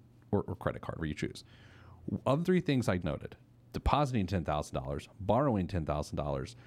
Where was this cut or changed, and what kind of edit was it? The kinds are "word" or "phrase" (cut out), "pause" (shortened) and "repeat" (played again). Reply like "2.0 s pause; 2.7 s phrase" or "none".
1.0 s word; 2.4 s word; 3.0 s word